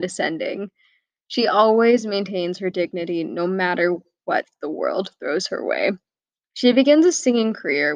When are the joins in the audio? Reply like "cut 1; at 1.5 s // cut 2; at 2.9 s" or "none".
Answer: none